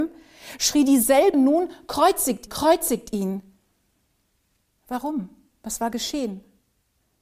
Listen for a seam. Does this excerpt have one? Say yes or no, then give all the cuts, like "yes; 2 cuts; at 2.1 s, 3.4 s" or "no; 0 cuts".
yes; 2 cuts; at 1.3 s, 2.5 s